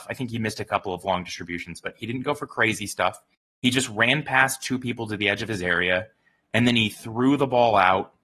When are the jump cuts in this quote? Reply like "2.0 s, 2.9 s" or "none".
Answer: none